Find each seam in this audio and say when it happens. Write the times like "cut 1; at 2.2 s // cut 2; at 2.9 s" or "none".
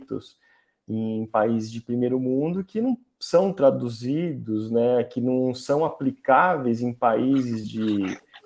none